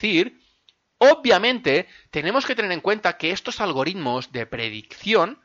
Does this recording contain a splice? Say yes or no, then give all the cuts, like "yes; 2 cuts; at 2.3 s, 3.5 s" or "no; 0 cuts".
no; 0 cuts